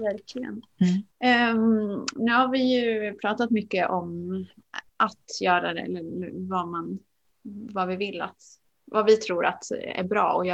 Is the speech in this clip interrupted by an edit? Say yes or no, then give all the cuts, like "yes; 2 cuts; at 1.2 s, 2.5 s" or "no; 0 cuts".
yes; 1 cut; at 1.1 s